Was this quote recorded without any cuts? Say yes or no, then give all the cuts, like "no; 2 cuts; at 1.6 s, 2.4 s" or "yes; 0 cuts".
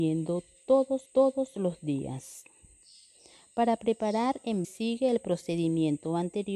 no; 2 cuts; at 1.1 s, 4.6 s